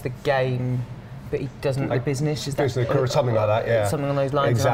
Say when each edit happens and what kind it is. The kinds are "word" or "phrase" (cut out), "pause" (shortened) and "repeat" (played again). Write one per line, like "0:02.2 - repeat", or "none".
0:01.9 - word

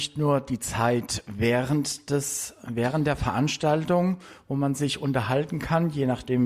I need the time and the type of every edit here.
none

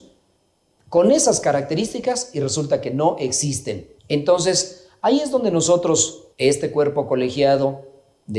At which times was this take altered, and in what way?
0:04.0 - pause
0:06.3 - pause

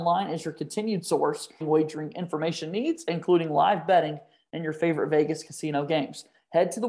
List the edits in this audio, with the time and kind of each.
0:01.6 - phrase

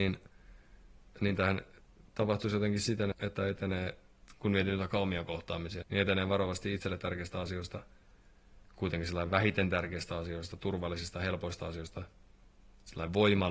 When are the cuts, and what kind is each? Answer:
0:03.1 - word
0:05.8 - word

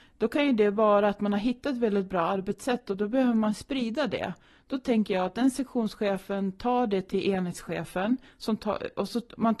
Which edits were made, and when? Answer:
none

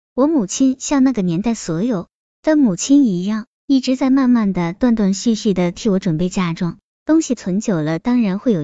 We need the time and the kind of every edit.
none

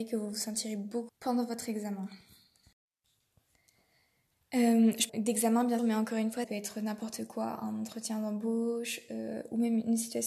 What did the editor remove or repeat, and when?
0:01.1 - word
0:05.1 - word
0:05.8 - word
0:06.4 - word

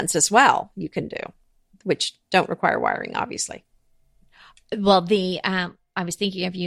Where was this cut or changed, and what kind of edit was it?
none

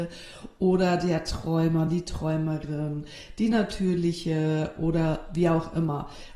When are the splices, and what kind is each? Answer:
none

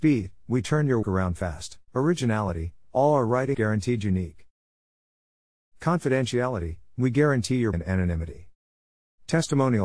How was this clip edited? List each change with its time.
0:01.0 - word
0:01.9 - pause
0:03.5 - word
0:07.7 - word

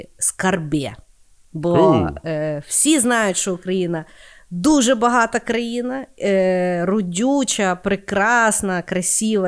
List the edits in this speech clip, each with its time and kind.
none

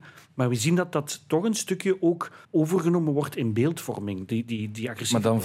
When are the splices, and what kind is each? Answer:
0:02.4 - pause

